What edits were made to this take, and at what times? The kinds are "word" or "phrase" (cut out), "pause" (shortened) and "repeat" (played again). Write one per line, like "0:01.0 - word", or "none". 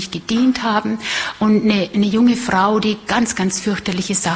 none